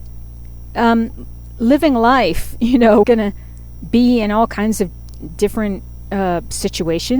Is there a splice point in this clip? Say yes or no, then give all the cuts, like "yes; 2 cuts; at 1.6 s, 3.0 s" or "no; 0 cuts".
yes; 1 cut; at 3.0 s